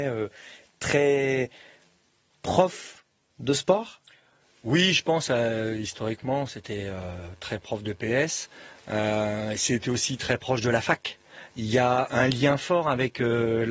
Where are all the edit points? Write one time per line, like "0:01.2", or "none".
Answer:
0:12.1